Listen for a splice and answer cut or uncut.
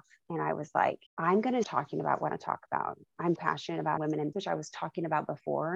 cut